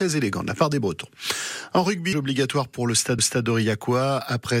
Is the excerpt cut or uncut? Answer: cut